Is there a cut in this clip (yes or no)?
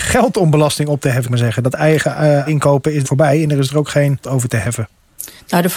yes